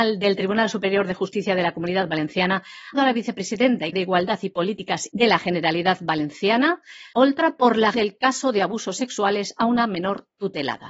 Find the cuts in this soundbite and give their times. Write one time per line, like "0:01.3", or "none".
0:02.9
0:03.9
0:05.1
0:07.1
0:07.9